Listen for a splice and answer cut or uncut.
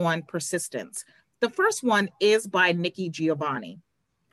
uncut